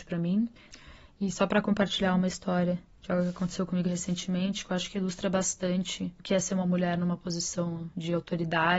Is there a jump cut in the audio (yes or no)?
no